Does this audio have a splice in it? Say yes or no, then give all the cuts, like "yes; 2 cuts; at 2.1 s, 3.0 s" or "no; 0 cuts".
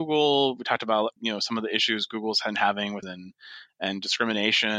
yes; 2 cuts; at 1.2 s, 3.0 s